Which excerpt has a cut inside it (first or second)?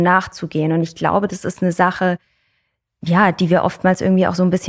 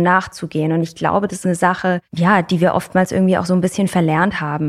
second